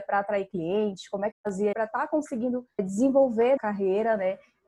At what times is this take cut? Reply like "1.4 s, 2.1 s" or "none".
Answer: 1.3 s, 1.7 s, 2.8 s, 3.6 s